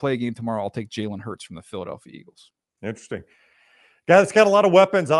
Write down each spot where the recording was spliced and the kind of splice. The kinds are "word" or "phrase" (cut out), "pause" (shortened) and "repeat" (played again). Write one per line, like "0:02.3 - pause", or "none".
none